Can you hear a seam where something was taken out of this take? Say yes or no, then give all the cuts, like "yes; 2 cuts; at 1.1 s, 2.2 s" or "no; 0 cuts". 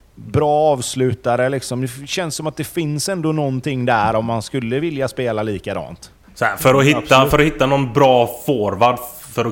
yes; 1 cut; at 6.2 s